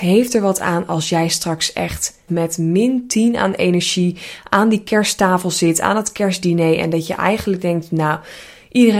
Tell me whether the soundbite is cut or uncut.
cut